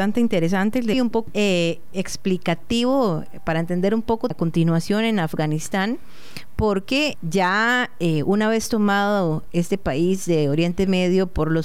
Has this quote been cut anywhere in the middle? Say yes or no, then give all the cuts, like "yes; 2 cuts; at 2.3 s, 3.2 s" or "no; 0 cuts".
yes; 5 cuts; at 0.9 s, 1.3 s, 1.9 s, 4.3 s, 7.1 s